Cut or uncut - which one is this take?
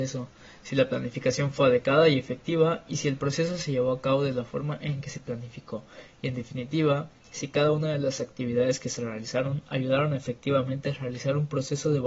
uncut